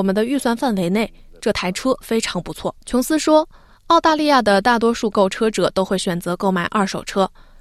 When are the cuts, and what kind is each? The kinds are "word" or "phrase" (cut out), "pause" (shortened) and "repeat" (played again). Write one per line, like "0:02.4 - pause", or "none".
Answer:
0:02.8 - pause